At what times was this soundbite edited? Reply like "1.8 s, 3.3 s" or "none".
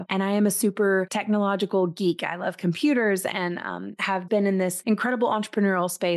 4.3 s